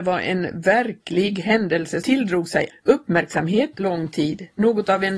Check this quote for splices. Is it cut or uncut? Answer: cut